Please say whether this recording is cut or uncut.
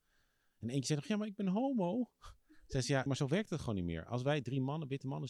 cut